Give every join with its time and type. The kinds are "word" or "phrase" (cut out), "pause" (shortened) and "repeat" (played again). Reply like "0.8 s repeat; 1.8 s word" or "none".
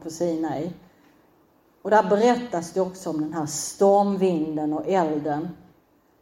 none